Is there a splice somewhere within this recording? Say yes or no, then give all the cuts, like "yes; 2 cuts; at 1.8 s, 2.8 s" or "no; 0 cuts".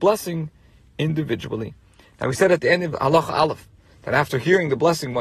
no; 0 cuts